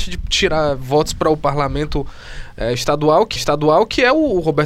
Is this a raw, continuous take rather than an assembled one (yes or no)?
no